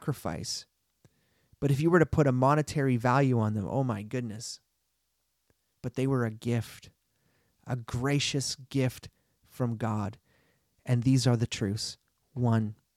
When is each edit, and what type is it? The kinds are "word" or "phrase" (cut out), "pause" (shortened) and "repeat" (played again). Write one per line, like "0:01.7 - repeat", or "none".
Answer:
none